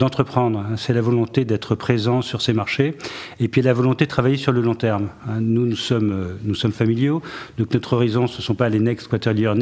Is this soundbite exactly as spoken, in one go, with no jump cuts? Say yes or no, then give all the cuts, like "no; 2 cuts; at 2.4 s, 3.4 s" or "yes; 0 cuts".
yes; 0 cuts